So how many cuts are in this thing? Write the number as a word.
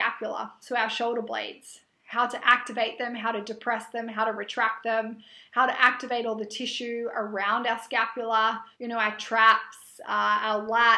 one